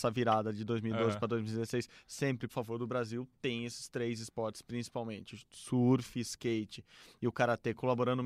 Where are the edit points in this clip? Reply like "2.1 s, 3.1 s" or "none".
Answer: 2.5 s